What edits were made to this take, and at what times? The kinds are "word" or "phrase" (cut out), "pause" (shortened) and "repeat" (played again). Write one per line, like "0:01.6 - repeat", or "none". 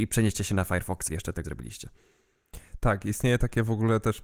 0:01.1 - word
0:01.4 - word